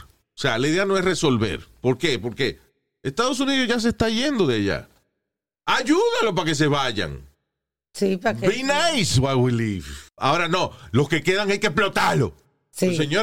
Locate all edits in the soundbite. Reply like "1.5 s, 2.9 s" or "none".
10.1 s